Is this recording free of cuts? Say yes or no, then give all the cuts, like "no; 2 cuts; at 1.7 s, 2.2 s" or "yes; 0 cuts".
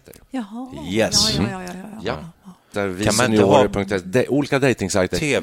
no; 1 cut; at 2.7 s